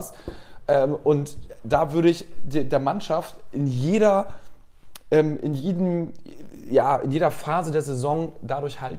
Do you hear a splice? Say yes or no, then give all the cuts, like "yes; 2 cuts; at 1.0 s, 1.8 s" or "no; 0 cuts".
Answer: no; 0 cuts